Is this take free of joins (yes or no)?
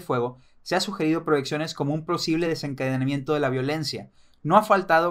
yes